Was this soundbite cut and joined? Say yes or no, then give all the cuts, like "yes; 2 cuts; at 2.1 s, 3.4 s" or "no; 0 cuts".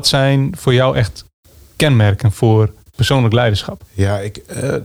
no; 0 cuts